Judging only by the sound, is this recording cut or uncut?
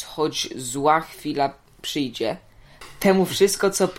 uncut